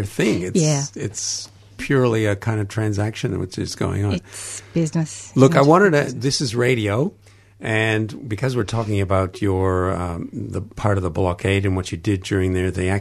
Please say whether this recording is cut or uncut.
uncut